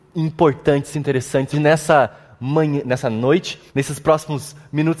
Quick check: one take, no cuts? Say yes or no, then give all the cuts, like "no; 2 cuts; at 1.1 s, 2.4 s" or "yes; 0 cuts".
no; 3 cuts; at 0.9 s, 1.5 s, 3.7 s